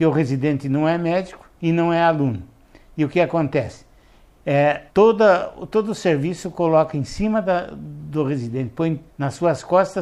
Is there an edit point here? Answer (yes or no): yes